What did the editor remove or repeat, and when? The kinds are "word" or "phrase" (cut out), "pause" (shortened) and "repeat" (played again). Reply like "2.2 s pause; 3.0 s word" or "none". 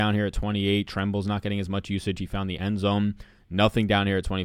none